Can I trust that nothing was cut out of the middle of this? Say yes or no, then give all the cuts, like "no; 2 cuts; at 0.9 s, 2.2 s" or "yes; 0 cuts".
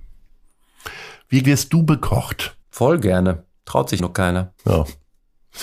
no; 4 cuts; at 1.4 s, 2.6 s, 4.0 s, 4.6 s